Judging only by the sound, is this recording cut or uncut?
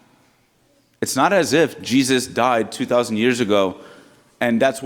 uncut